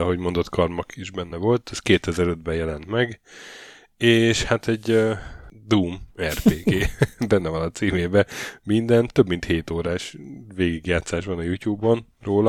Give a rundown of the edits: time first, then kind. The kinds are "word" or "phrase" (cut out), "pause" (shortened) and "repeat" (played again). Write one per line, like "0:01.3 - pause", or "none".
none